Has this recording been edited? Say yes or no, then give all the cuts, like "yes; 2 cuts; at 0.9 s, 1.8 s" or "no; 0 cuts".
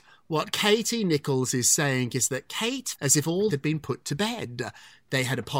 yes; 2 cuts; at 3.0 s, 3.5 s